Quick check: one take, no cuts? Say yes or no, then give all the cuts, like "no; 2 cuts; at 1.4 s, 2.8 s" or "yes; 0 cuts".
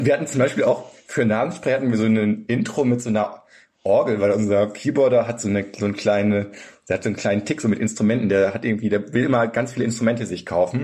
yes; 0 cuts